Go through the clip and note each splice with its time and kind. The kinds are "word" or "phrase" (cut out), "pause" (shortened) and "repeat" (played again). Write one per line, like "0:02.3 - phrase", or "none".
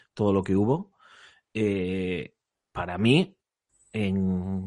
none